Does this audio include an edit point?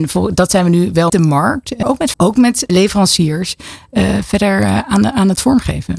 yes; 4 cuts; at 1.1 s, 1.8 s, 2.1 s, 2.7 s

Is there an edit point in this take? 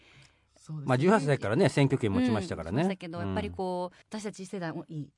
yes; 1 cut; at 4.0 s

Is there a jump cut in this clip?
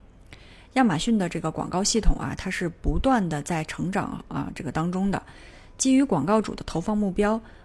no; 0 cuts

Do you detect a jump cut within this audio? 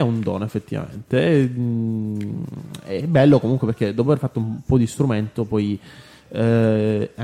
no; 0 cuts

